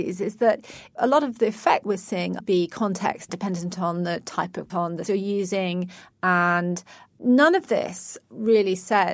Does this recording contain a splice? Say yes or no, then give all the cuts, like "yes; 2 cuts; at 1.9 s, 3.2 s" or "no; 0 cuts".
yes; 5 cuts; at 1.8 s, 2.4 s, 3.3 s, 4.7 s, 5.1 s